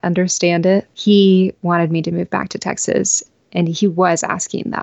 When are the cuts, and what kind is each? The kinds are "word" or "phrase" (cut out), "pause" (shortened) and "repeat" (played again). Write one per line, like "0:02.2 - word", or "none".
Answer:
0:00.9 - pause